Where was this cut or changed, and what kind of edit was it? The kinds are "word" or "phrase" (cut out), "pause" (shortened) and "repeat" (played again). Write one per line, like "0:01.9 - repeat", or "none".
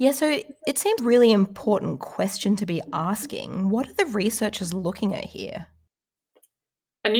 0:01.0 - word

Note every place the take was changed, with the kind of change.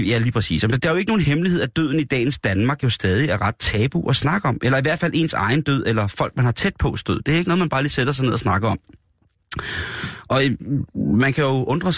none

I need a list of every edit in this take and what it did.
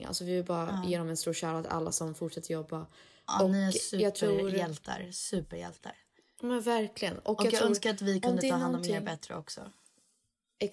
none

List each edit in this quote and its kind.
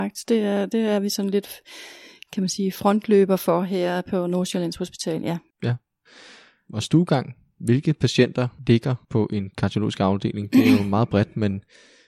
none

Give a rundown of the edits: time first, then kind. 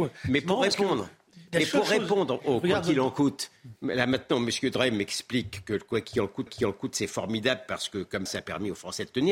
0:06.5 - repeat
0:08.3 - word

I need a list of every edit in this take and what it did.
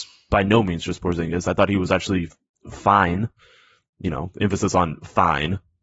none

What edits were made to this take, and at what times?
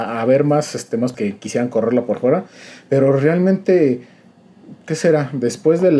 0:01.1 - word

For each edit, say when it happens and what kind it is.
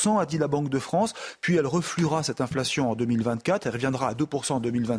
none

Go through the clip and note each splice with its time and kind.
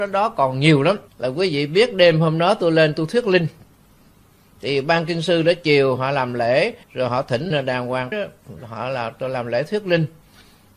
0:01.1 - pause
0:06.8 - pause
0:07.5 - word
0:08.1 - word

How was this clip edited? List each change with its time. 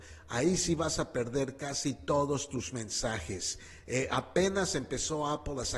none

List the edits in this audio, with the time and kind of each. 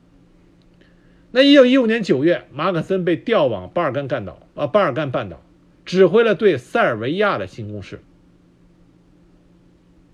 none

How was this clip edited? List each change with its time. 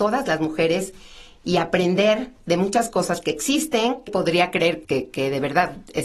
0:04.1 - word
0:04.8 - word

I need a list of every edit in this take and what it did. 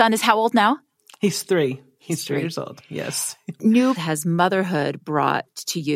0:03.6 - word
0:04.0 - word

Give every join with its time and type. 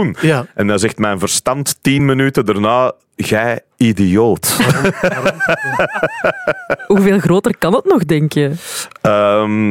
none

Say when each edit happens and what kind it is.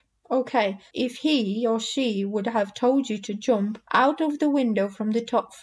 0:00.9 - word
0:03.8 - pause

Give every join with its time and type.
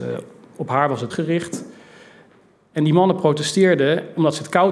0:01.1 - word

